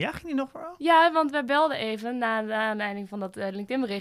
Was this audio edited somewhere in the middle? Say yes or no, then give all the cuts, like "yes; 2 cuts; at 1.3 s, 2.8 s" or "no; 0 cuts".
no; 0 cuts